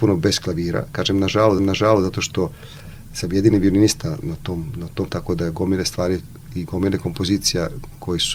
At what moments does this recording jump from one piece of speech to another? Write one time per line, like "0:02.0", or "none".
0:01.6
0:05.1